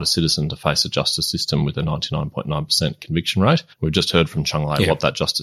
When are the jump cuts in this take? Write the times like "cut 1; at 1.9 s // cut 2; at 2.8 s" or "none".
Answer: cut 1; at 3.7 s